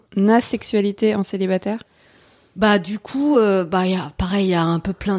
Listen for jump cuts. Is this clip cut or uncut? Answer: uncut